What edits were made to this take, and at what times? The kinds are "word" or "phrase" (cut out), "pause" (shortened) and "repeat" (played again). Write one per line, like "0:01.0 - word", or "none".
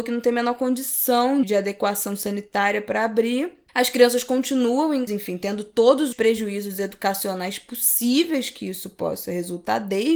0:01.4 - word
0:05.1 - phrase
0:06.1 - word